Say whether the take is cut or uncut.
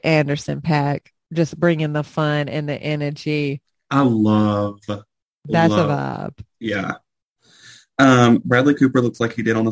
uncut